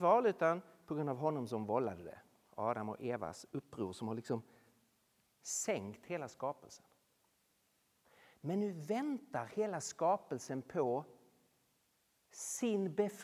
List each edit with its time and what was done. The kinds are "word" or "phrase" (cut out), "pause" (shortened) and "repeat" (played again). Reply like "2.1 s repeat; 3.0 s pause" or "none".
none